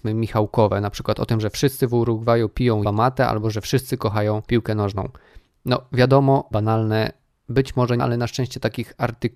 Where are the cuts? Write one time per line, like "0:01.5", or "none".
0:02.8
0:04.4
0:06.5
0:08.0